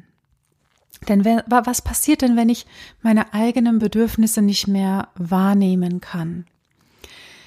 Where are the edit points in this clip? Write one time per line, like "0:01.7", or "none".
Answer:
none

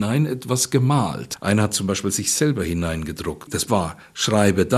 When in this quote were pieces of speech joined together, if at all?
0:03.7

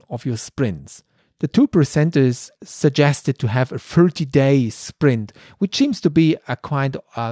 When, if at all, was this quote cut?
none

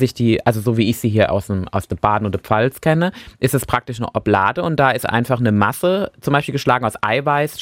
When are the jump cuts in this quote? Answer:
none

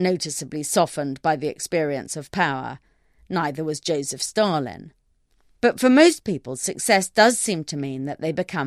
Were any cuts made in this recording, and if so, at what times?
none

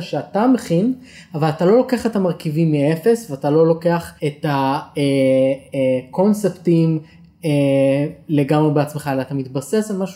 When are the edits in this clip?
0:04.2

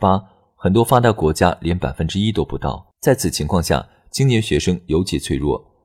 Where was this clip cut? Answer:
0:02.9

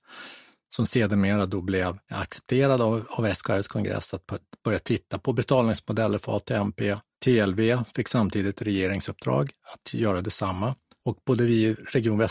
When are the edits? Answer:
none

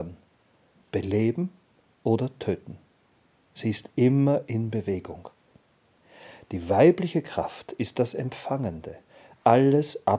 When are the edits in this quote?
none

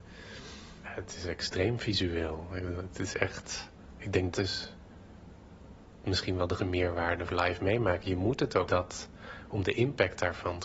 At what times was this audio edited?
0:04.3
0:06.6
0:07.3
0:08.7

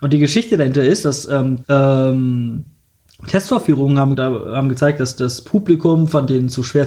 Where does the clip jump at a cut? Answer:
0:01.6
0:04.1

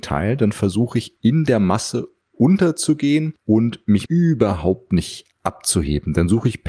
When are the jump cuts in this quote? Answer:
0:04.1

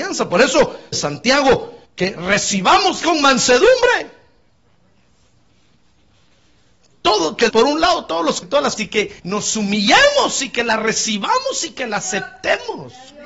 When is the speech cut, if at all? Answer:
0:00.9
0:01.8
0:03.0
0:06.9
0:07.5
0:08.4
0:08.8
0:09.2

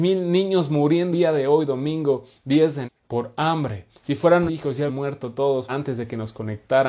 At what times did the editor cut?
0:01.1
0:02.8
0:04.5
0:04.9
0:05.7

